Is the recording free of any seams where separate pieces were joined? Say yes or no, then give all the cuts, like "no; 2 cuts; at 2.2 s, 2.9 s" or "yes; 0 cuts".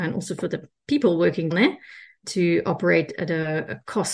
no; 2 cuts; at 1.5 s, 2.2 s